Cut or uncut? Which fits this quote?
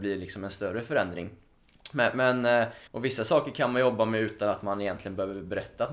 cut